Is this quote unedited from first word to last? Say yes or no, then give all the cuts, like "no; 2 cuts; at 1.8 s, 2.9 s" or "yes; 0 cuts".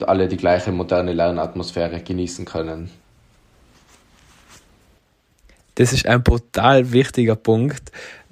yes; 0 cuts